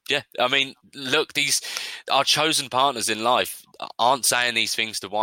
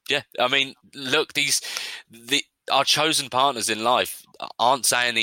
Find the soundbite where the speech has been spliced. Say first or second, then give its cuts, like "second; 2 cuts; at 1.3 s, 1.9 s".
first; 1 cut; at 2.0 s